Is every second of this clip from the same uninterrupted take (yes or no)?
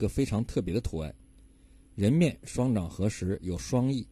yes